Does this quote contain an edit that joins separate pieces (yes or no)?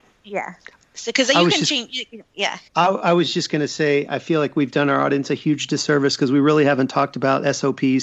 yes